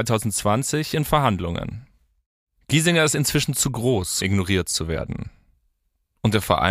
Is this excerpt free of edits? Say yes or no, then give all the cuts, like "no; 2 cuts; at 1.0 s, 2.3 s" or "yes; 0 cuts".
no; 1 cut; at 4.2 s